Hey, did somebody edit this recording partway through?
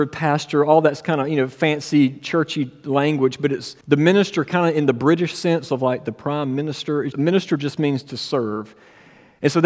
yes; 2 cuts; at 3.8 s, 7.1 s

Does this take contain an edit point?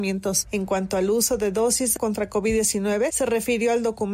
yes; 1 cut; at 2.0 s

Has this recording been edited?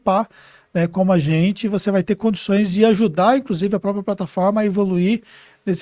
no; 0 cuts

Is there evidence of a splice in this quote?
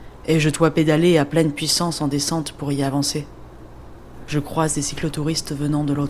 no; 0 cuts

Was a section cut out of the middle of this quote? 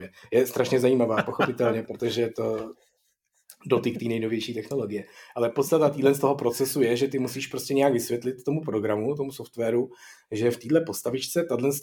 no; 0 cuts

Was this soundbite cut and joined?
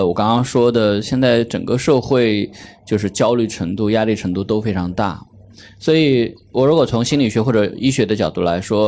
no; 0 cuts

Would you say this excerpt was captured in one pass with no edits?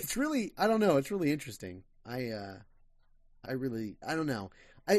no; 2 cuts; at 3.4 s, 4.0 s

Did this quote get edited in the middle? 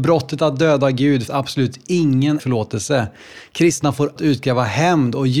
yes; 3 cuts; at 1.3 s, 2.4 s, 4.2 s

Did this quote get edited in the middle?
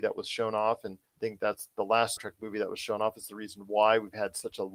yes; 2 cuts; at 1.1 s, 2.2 s

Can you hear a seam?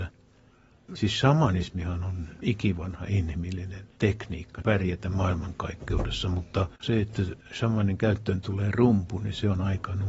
yes; 2 cuts; at 3.9 s, 6.7 s

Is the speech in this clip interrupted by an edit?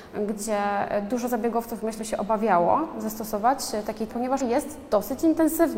yes; 3 cuts; at 2.0 s, 4.1 s, 4.4 s

